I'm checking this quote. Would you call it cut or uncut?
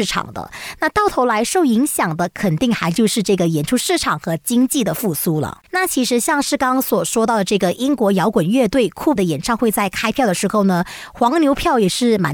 cut